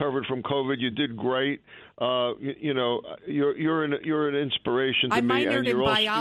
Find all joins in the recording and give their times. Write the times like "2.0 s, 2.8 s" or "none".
none